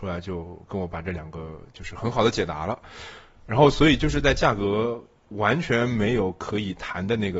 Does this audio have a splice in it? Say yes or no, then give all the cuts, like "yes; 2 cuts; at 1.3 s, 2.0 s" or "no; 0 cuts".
no; 0 cuts